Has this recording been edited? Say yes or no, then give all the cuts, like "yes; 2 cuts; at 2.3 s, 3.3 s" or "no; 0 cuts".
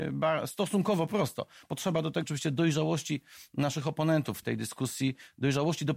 yes; 2 cuts; at 2.2 s, 4.4 s